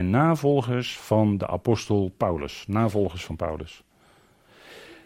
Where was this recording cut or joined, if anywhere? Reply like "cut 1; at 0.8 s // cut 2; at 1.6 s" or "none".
none